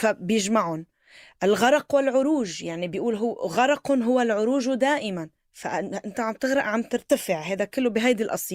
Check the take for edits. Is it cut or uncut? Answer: cut